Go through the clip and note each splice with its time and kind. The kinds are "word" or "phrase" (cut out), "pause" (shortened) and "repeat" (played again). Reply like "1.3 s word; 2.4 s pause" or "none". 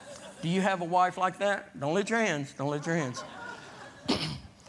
none